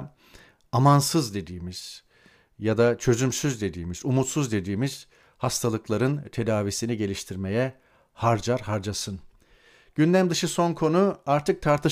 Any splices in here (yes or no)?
no